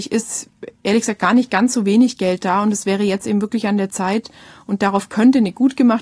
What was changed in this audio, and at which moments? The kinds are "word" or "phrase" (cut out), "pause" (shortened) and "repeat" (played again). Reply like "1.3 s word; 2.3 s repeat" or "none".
none